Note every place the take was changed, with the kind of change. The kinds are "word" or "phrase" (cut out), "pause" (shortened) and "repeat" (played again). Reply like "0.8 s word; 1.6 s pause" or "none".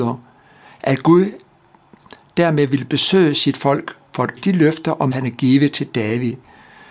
4.4 s word; 5.1 s word